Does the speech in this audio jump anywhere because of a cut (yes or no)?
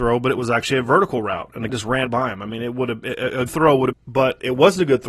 yes